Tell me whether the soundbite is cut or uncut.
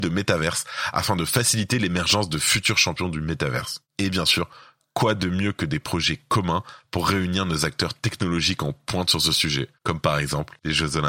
uncut